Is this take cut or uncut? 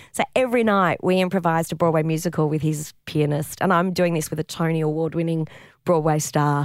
uncut